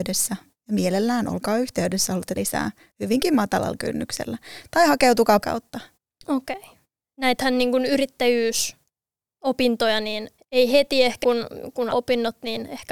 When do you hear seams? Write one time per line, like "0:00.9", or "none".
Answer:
0:02.4
0:05.4
0:06.0
0:07.0
0:10.4
0:11.2
0:11.9